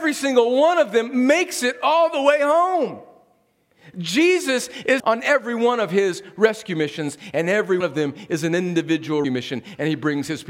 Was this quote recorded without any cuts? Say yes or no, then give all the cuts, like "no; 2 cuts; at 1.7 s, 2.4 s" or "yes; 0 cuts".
no; 3 cuts; at 5.0 s, 7.8 s, 9.2 s